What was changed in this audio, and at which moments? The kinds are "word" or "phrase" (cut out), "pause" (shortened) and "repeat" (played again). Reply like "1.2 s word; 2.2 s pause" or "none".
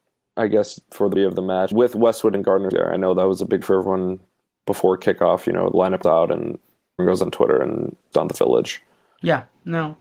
1.2 s word; 1.7 s word; 2.7 s word; 3.6 s word; 6.0 s word; 7.0 s word; 8.1 s word